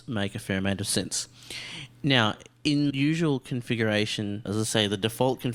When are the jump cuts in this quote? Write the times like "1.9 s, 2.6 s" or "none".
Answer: 2.9 s, 4.5 s

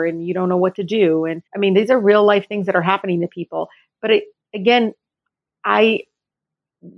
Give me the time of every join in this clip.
1.5 s

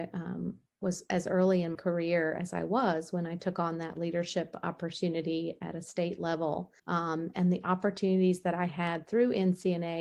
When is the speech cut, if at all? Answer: 1.7 s, 6.8 s

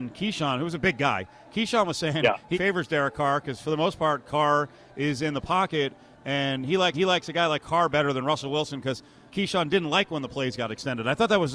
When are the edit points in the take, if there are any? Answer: 2.5 s, 6.9 s, 9.3 s

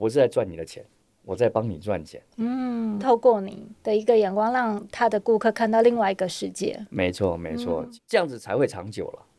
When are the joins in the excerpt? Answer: none

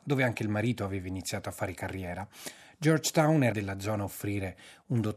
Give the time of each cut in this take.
3.5 s

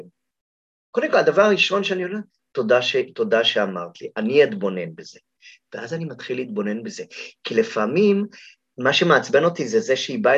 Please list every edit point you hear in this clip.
none

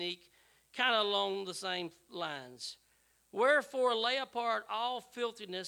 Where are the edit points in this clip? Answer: none

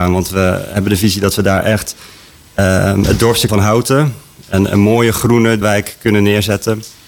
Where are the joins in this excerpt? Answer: 3.5 s, 5.6 s

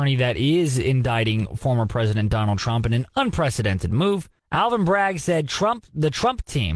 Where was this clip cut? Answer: 4.4 s

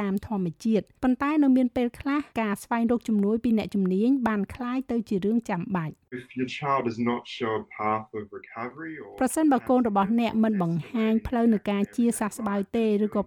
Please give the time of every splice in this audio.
1.0 s, 2.3 s, 6.0 s

